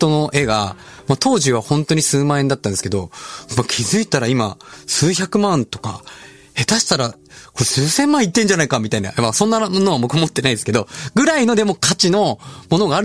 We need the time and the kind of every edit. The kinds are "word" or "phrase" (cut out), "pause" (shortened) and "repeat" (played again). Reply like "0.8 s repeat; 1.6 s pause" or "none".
none